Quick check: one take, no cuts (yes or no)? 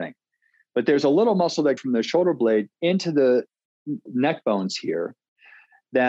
no